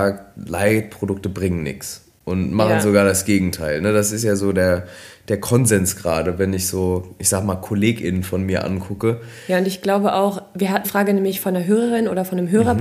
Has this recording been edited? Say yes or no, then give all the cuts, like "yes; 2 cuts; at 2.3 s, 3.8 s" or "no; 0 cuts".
yes; 1 cut; at 10.8 s